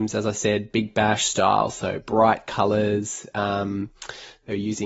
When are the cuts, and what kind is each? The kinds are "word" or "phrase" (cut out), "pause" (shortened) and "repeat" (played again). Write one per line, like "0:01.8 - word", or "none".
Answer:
none